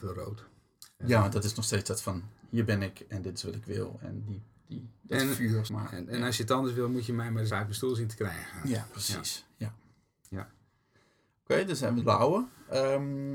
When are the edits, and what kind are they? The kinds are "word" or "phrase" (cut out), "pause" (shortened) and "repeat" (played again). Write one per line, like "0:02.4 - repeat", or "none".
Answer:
0:05.7 - word
0:07.5 - word
0:12.0 - word